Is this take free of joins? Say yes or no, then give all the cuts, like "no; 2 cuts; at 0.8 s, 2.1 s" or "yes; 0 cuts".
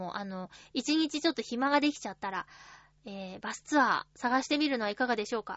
yes; 0 cuts